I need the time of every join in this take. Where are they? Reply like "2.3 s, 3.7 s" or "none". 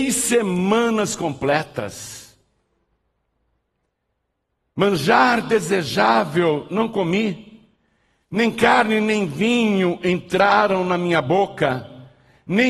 none